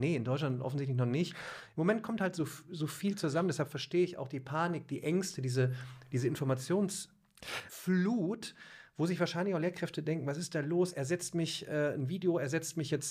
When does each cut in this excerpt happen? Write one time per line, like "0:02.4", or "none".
none